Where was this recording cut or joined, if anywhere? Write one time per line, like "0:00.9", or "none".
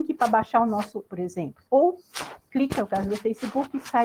0:01.1
0:01.7
0:02.7